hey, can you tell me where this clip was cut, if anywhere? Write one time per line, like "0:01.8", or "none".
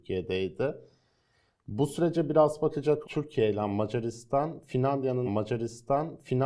0:03.0
0:05.3